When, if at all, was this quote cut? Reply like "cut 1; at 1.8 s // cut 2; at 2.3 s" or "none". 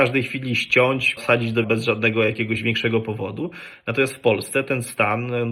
cut 1; at 1.2 s // cut 2; at 1.6 s